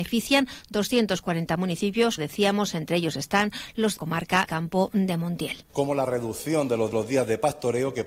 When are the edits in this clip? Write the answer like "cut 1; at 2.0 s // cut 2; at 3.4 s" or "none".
cut 1; at 2.2 s // cut 2; at 4.0 s // cut 3; at 4.5 s // cut 4; at 5.7 s // cut 5; at 6.9 s